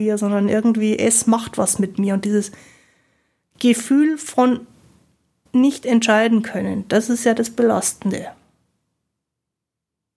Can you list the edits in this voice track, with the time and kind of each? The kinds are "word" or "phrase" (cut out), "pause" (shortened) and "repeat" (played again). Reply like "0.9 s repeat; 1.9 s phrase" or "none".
none